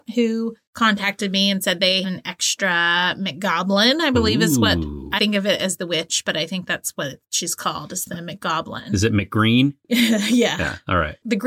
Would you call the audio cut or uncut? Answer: cut